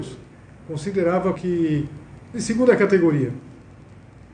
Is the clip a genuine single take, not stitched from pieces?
no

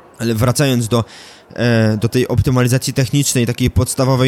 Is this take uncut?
yes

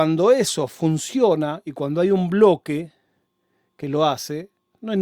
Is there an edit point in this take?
no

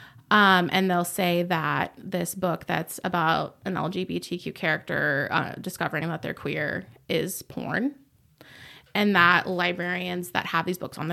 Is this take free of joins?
yes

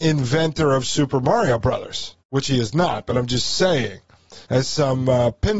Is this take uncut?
no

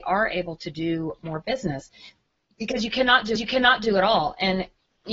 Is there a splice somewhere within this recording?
yes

